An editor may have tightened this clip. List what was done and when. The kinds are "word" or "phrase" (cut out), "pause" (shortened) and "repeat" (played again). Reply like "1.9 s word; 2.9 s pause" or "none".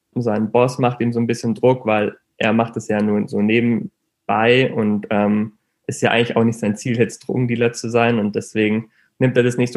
none